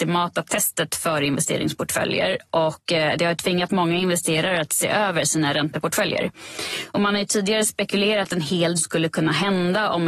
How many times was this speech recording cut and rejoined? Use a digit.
2